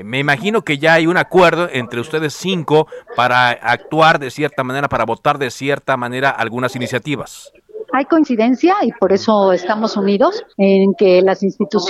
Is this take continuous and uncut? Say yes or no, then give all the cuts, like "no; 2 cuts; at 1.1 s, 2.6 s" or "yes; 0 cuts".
no; 1 cut; at 10.5 s